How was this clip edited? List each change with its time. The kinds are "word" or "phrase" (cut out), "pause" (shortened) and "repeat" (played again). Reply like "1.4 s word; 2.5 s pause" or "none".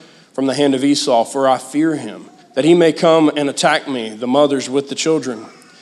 2.4 s pause